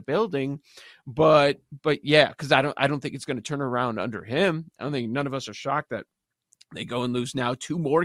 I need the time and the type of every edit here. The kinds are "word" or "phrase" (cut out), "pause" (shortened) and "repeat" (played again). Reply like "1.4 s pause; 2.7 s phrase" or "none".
none